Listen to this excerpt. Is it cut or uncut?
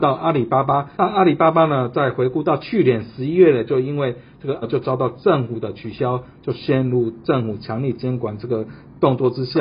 cut